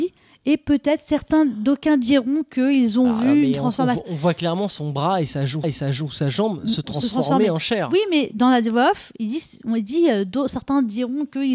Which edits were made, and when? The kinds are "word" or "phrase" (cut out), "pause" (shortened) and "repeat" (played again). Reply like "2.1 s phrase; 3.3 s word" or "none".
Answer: 5.6 s repeat